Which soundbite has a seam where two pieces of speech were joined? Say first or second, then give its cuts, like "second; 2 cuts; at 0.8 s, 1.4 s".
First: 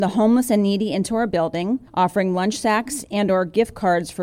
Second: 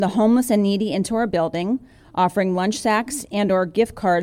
first; 1 cut; at 1.9 s